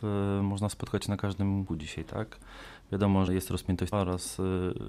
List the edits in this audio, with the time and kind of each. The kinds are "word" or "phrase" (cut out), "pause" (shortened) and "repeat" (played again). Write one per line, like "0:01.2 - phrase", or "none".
0:01.7 - word
0:03.3 - word
0:03.9 - word